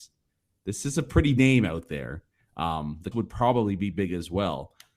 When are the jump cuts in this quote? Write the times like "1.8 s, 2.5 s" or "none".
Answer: 1.4 s, 3.1 s, 3.9 s